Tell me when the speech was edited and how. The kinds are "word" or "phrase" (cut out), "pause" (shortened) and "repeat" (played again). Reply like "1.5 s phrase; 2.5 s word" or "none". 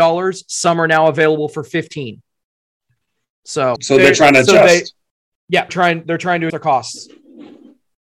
3.8 s word; 5.7 s word; 6.5 s word

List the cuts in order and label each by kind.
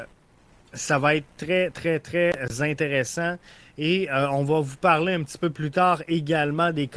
none

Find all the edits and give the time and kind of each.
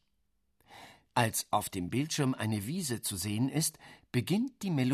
none

